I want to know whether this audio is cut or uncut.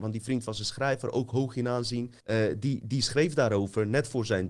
cut